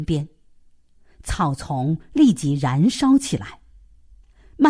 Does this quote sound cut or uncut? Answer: uncut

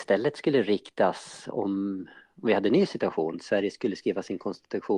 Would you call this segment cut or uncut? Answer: uncut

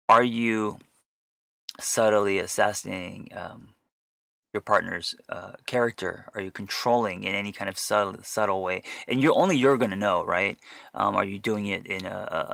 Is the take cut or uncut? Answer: uncut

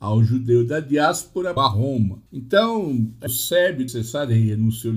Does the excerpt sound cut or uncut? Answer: cut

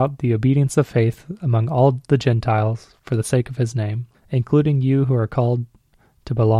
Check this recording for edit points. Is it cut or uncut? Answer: cut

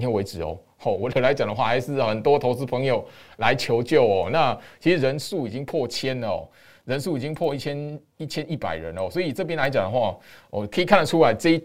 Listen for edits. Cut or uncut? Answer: cut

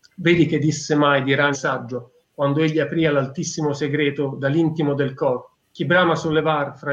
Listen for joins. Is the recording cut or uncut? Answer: cut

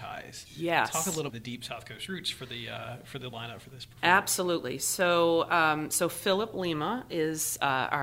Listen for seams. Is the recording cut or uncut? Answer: cut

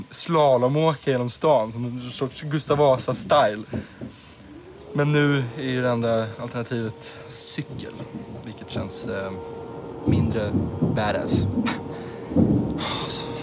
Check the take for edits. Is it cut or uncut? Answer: uncut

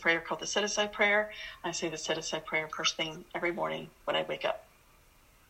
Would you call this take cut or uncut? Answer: uncut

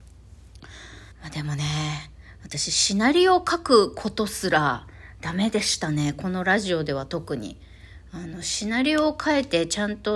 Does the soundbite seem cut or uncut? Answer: cut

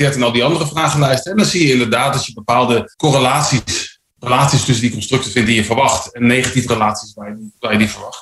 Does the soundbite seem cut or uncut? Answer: cut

